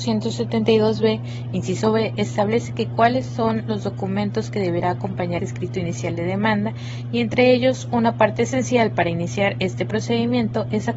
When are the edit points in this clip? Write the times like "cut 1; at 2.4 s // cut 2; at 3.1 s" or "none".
cut 1; at 5.4 s